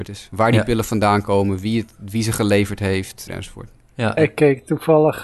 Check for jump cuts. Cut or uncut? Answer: cut